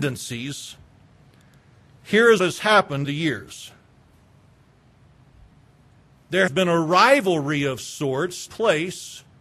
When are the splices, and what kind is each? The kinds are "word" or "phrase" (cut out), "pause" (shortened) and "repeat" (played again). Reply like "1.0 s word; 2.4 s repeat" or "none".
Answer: 2.4 s word; 3.0 s word; 6.5 s word; 8.5 s word